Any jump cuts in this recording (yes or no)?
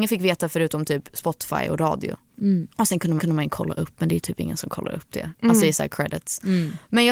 yes